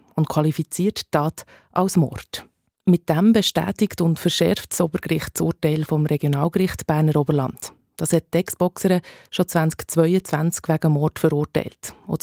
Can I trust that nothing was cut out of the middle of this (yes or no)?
yes